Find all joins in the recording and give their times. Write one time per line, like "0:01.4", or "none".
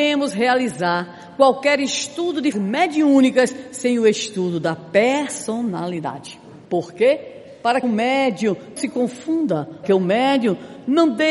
0:02.5
0:06.6
0:07.8
0:08.8
0:09.8